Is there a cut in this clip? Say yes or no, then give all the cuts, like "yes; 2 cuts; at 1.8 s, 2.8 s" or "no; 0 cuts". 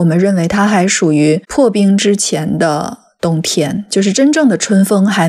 yes; 1 cut; at 1.4 s